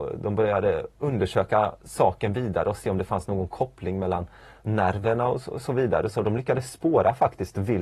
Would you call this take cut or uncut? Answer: uncut